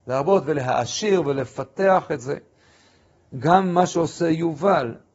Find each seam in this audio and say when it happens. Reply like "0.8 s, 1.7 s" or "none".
none